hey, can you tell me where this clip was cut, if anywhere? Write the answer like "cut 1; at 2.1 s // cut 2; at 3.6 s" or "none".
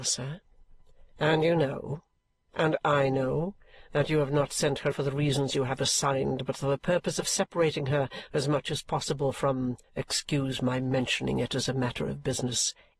cut 1; at 4.9 s // cut 2; at 9.8 s